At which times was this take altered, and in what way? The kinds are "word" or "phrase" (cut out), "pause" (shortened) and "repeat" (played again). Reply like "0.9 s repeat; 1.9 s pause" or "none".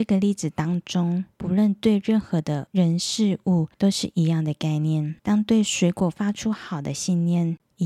1.3 s pause; 3.7 s pause; 5.2 s pause

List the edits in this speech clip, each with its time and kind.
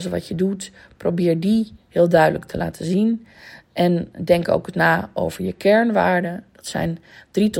none

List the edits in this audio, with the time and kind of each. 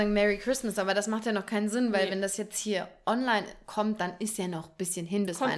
none

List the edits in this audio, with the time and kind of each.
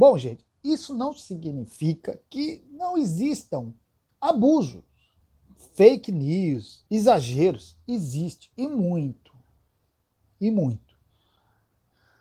5.2 s pause; 6.9 s pause; 8.5 s pause

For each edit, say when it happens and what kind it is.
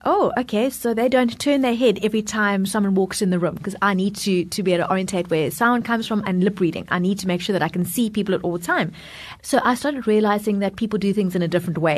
none

